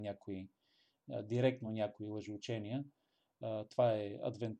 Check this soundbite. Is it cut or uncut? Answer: uncut